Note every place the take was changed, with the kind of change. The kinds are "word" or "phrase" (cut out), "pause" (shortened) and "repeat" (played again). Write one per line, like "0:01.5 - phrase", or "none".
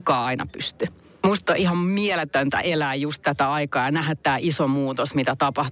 none

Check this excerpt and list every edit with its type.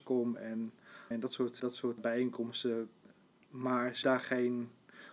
0:01.1 - word
0:01.6 - word
0:02.0 - word
0:04.0 - word

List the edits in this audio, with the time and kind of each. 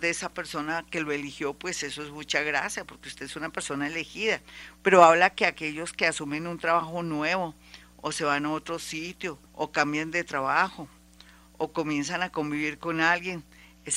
0:09.5 - pause

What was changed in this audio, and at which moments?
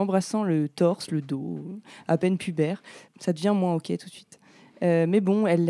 0:03.1 - pause

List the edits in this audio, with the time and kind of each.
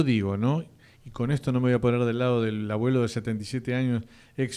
none

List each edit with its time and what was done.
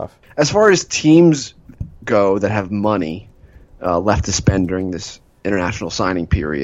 none

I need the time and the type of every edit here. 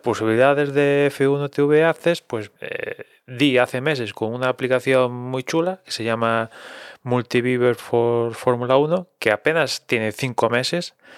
0:02.6 - pause

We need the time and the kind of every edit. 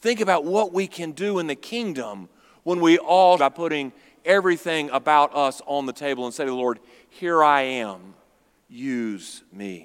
0:03.4 - phrase

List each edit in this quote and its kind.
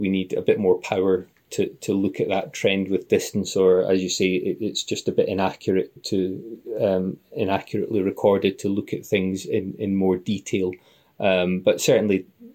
0:06.0 - word

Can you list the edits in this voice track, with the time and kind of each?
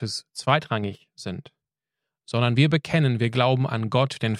0:02.6 - word

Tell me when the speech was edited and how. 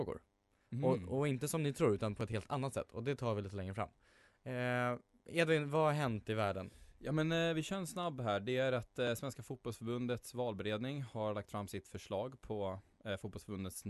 none

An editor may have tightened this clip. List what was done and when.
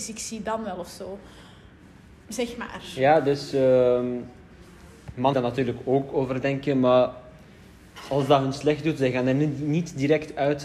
0:05.3 - word

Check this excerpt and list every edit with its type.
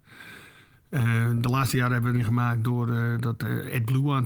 0:02.1 - phrase

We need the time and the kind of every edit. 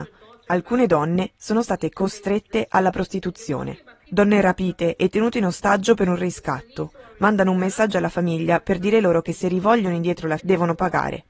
0:10.4 - word

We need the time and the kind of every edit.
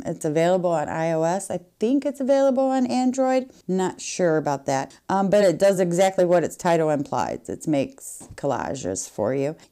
none

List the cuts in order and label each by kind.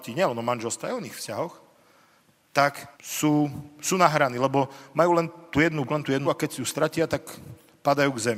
0:02.9 - pause
0:05.8 - word
0:06.2 - word

